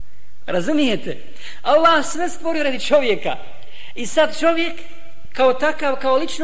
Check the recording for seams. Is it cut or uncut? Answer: uncut